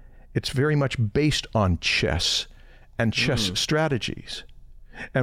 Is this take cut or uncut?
uncut